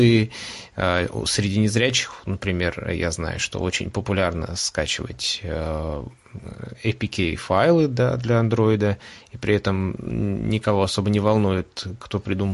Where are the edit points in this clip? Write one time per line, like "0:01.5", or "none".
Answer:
none